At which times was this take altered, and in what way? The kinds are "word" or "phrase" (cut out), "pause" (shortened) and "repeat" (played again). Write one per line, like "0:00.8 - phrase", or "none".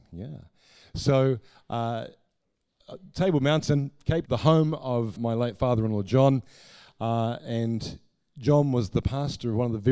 0:04.3 - word
0:05.2 - word